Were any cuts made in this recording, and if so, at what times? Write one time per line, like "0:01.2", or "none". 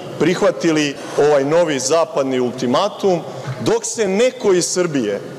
none